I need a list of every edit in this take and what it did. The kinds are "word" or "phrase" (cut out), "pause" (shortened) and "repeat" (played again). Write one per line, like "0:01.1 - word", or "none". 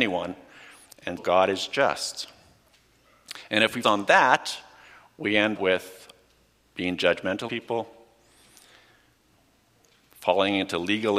0:01.2 - word
0:03.8 - word
0:05.5 - word
0:07.5 - word